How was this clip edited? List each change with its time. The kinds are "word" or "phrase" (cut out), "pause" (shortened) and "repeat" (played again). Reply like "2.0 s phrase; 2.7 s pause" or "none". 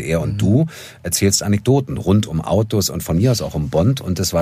none